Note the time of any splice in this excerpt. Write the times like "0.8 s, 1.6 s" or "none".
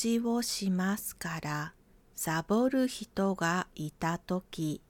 1.9 s